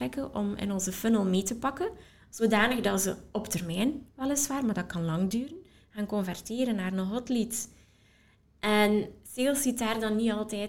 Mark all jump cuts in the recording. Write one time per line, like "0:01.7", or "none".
none